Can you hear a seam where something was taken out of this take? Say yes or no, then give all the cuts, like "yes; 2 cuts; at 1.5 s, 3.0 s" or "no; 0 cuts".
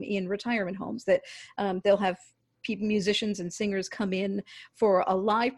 no; 0 cuts